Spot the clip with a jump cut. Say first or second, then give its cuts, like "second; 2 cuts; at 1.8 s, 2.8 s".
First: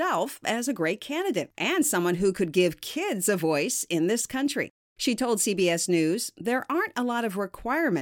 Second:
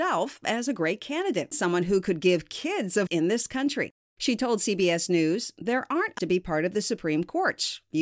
second; 3 cuts; at 1.5 s, 3.1 s, 6.2 s